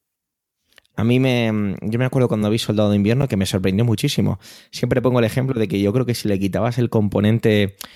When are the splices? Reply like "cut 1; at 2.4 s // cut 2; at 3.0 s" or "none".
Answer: none